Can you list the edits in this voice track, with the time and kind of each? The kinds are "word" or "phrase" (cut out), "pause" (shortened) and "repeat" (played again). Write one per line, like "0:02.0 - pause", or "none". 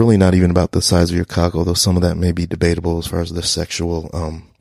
none